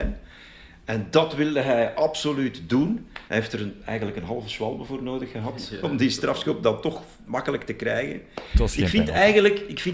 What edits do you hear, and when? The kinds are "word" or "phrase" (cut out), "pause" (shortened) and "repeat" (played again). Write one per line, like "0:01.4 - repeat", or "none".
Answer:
0:03.3 - pause